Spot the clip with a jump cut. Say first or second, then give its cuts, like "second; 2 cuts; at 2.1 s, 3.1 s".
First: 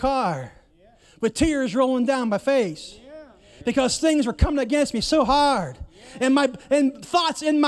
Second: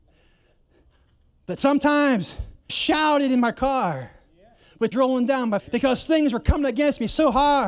second; 3 cuts; at 2.7 s, 4.9 s, 5.6 s